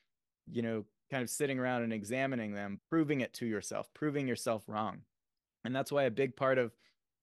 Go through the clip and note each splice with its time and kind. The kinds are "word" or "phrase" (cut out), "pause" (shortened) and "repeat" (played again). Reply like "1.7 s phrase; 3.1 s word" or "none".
2.8 s word